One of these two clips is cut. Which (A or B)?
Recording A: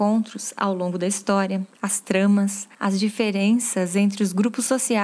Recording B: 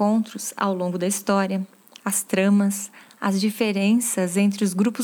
A